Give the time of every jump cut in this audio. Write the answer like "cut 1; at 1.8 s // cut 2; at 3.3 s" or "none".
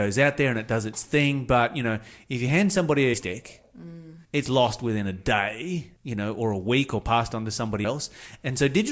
cut 1; at 3.1 s // cut 2; at 4.2 s // cut 3; at 6.0 s // cut 4; at 7.8 s